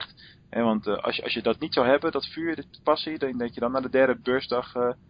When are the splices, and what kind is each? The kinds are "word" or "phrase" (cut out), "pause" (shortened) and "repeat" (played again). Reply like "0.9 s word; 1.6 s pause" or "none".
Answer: none